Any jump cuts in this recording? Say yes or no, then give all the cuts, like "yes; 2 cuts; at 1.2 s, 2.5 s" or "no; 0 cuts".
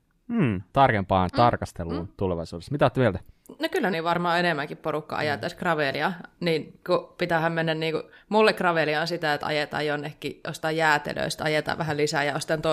yes; 2 cuts; at 3.3 s, 3.9 s